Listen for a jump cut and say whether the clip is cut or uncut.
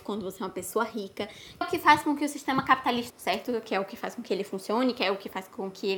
cut